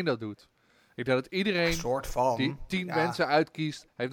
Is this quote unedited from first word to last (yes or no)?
yes